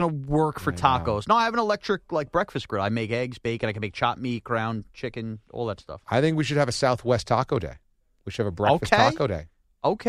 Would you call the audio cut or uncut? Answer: uncut